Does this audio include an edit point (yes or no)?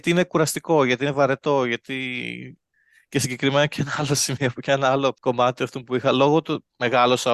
no